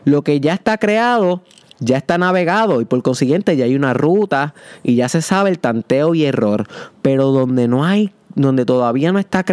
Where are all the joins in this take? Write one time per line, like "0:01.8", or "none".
none